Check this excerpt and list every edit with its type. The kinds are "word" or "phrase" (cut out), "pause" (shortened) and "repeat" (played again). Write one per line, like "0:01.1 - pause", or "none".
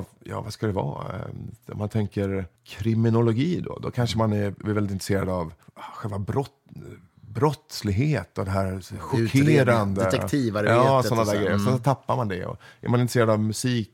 0:02.6 - pause
0:05.6 - pause